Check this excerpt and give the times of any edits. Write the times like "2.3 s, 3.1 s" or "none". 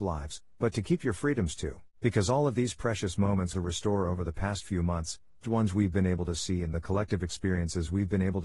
1.9 s, 3.5 s, 5.4 s